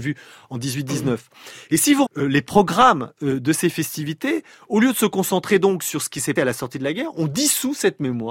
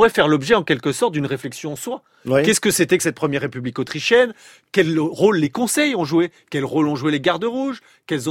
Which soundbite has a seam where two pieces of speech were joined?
first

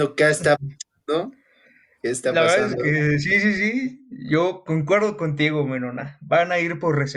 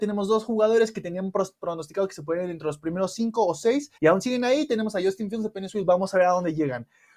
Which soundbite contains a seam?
second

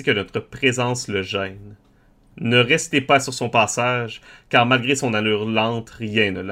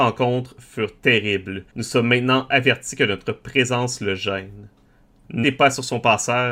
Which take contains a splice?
second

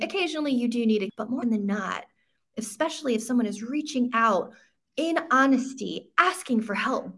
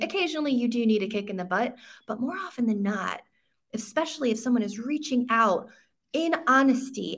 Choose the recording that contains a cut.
first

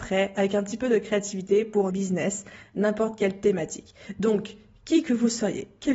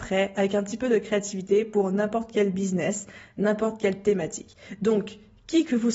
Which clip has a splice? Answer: first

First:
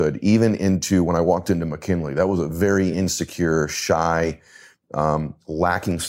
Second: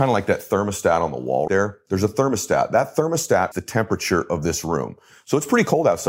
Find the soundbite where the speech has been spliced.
second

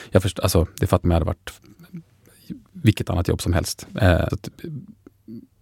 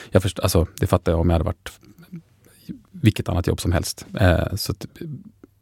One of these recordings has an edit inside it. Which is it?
first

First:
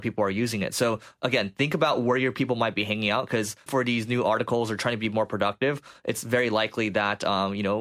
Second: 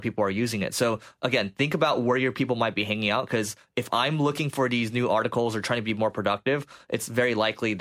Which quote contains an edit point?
first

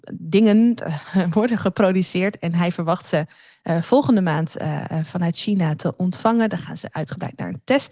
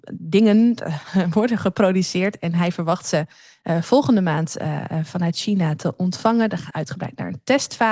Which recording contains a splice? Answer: second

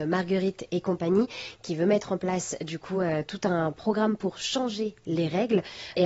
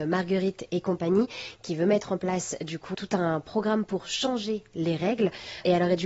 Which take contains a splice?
second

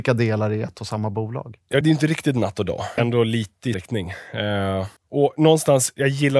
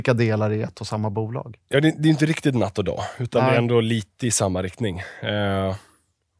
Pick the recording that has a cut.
first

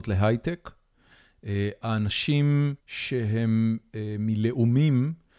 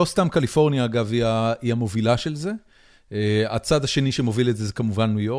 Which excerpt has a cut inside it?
first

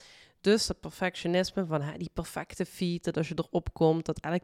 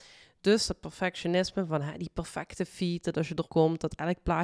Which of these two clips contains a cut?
second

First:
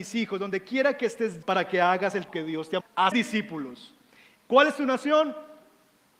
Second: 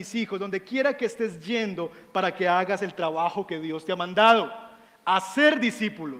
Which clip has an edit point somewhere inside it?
first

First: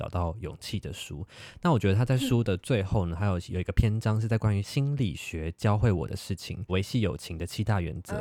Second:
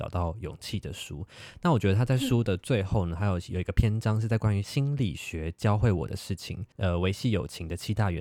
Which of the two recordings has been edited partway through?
first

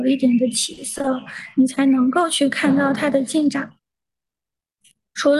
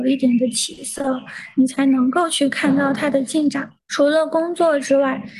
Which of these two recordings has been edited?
second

